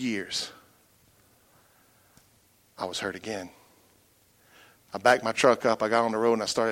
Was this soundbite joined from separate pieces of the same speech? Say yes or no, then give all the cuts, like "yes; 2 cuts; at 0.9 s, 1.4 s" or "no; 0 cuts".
no; 0 cuts